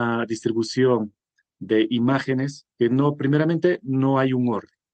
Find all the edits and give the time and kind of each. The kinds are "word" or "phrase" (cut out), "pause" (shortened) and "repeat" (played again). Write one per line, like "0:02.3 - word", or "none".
0:02.7 - pause